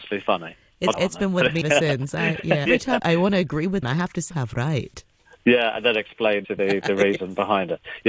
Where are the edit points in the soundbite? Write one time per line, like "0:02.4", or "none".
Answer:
0:00.9
0:01.6
0:02.7
0:03.0
0:03.8
0:04.3
0:06.4